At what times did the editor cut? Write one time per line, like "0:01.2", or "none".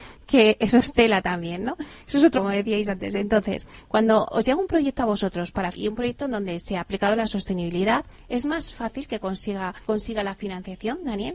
0:02.3
0:04.3
0:05.7
0:09.9